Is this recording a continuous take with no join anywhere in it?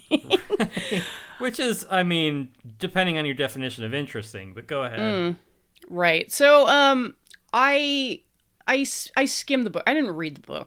yes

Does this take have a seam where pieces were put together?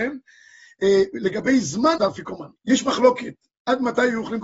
yes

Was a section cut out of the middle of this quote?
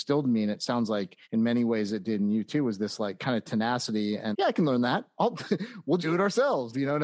yes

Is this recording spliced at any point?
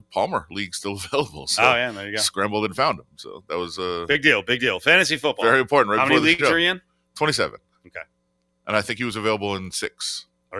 no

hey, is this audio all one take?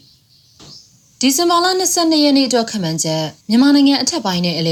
no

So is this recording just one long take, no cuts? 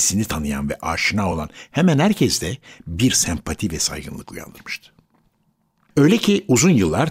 yes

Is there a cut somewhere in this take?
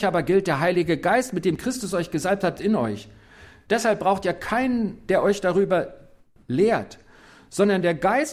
yes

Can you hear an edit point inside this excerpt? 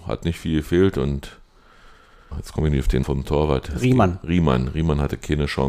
yes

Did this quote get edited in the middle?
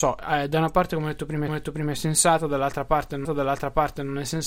yes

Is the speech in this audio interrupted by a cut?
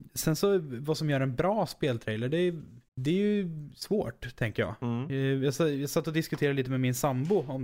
yes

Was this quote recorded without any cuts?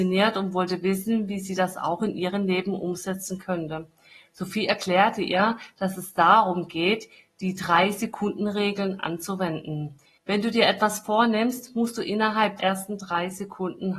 no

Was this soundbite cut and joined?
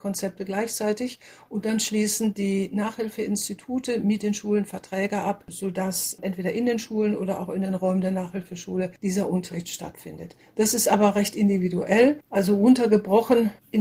no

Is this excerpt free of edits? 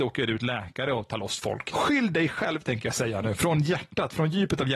yes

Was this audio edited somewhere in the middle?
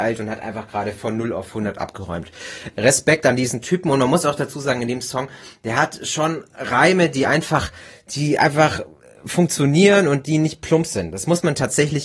no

